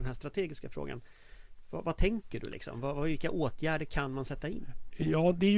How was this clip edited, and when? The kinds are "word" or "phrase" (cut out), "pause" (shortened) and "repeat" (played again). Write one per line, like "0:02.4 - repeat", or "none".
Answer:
none